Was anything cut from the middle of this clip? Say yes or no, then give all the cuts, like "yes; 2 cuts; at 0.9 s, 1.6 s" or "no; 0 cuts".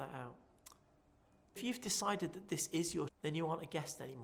yes; 2 cuts; at 1.6 s, 3.1 s